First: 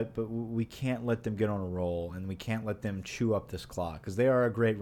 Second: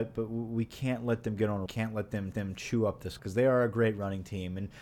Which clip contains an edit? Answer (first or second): second